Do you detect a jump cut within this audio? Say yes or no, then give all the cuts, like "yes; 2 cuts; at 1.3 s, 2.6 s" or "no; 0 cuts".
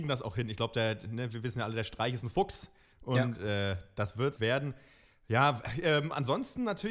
yes; 1 cut; at 4.4 s